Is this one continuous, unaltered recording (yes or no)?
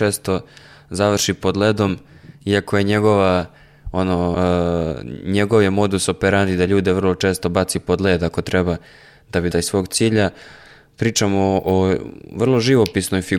no